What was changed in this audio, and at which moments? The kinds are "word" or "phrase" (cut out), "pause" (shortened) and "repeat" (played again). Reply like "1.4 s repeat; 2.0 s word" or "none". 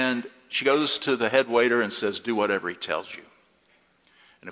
none